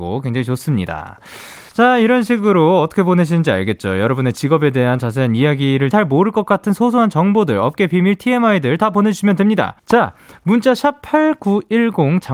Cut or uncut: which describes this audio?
cut